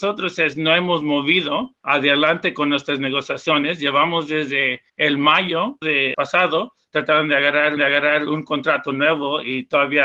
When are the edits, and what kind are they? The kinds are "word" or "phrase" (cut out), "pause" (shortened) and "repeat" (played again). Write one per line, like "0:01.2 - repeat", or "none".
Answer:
0:01.8 - pause
0:04.9 - pause
0:05.8 - phrase
0:06.1 - word
0:07.8 - repeat